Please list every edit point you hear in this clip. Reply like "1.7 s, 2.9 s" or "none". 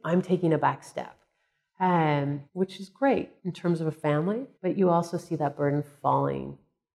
2.5 s, 3.4 s, 4.5 s